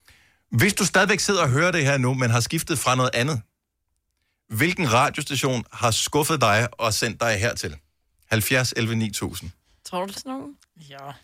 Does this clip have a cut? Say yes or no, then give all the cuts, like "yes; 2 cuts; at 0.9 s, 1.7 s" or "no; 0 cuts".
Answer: yes; 1 cut; at 10.2 s